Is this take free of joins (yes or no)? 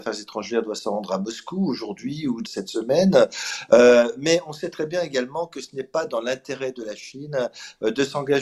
no